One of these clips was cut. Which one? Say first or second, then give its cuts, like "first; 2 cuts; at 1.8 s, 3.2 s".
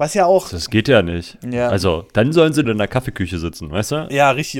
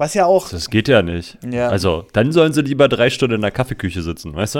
first; 1 cut; at 2.6 s